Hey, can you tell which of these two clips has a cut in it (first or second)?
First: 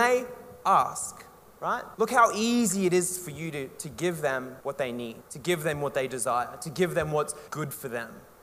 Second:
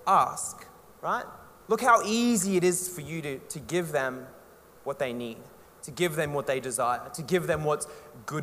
first